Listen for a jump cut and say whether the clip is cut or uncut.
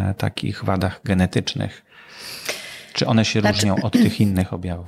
uncut